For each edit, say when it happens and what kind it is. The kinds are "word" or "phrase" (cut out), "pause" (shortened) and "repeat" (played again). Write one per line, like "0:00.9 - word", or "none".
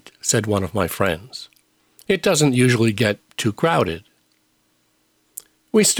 none